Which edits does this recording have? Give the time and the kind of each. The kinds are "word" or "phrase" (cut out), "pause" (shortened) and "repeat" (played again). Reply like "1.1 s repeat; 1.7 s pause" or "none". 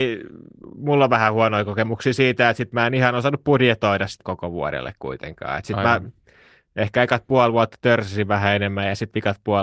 4.2 s word